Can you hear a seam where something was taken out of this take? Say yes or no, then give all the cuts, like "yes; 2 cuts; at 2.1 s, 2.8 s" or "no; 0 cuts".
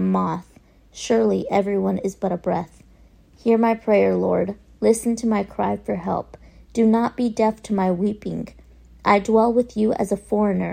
no; 0 cuts